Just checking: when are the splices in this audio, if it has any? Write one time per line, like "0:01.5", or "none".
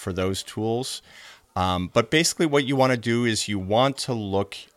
none